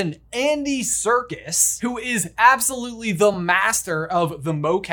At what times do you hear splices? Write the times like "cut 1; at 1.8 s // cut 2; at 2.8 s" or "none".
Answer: none